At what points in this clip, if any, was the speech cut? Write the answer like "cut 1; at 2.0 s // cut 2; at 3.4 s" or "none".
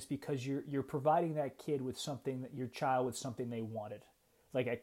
none